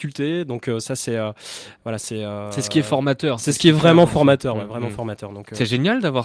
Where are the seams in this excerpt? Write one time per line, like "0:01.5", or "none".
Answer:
none